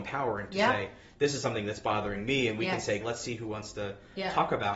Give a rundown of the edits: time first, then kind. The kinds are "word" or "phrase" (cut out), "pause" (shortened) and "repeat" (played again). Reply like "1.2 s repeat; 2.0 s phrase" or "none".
3.0 s word

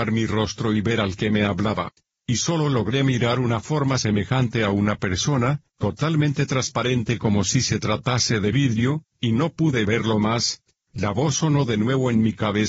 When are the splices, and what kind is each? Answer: none

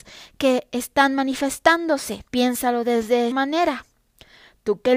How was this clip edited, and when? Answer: 2.3 s pause; 3.3 s word

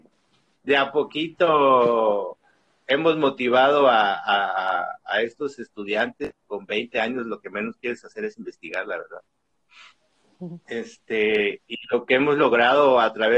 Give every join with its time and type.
none

